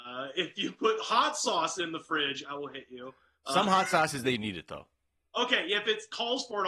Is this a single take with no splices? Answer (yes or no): yes